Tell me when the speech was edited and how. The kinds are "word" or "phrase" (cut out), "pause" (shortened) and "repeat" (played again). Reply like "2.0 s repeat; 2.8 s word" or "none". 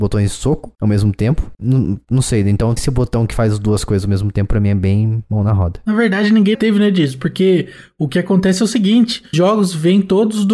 2.8 s word; 6.5 s word; 9.3 s word